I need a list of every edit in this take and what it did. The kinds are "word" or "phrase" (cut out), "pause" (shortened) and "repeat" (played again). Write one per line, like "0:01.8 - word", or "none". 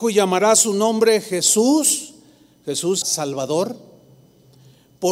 0:03.0 - word